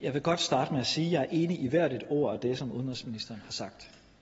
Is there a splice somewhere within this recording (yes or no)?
no